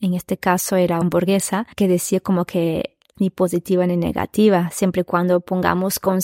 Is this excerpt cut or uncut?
cut